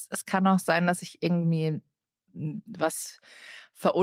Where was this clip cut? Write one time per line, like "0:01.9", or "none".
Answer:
none